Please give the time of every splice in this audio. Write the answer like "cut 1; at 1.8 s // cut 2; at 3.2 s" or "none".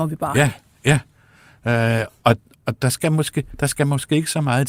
cut 1; at 2.5 s

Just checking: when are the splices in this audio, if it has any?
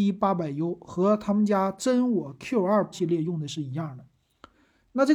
cut 1; at 2.9 s

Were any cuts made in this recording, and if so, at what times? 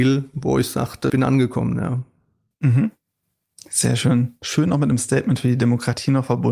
cut 1; at 1.1 s

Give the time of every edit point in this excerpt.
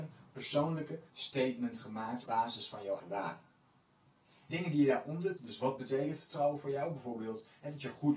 cut 1; at 1.1 s // cut 2; at 2.3 s // cut 3; at 3.0 s // cut 4; at 4.5 s // cut 5; at 5.4 s

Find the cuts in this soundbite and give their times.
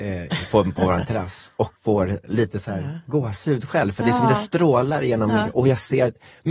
cut 1; at 1.8 s

